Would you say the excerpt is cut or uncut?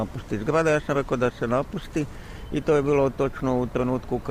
uncut